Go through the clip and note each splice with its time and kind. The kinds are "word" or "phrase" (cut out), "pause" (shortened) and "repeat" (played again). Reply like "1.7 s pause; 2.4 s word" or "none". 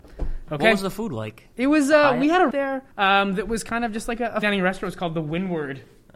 1.5 s pause; 2.5 s word; 2.9 s pause; 4.4 s word